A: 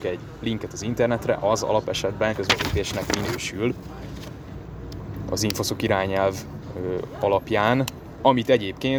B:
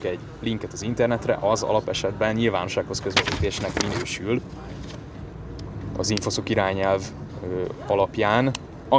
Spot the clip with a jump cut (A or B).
A